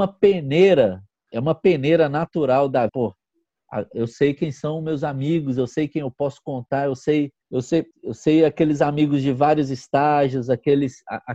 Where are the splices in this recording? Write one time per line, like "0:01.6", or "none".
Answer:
0:02.9
0:07.4
0:07.9